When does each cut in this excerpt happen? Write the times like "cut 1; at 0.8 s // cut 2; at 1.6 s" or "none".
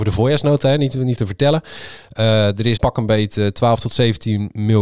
cut 1; at 1.2 s // cut 2; at 2.8 s

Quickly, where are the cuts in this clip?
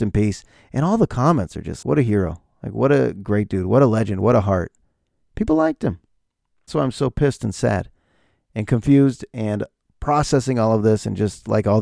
cut 1; at 1.8 s // cut 2; at 6.7 s

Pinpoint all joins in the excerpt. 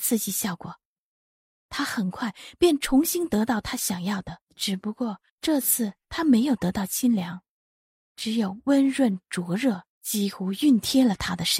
cut 1; at 4.5 s // cut 2; at 5.3 s // cut 3; at 7.9 s // cut 4; at 9.9 s

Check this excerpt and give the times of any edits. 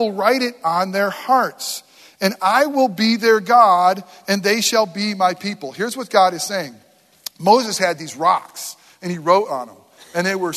none

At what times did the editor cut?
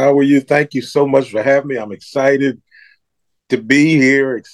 none

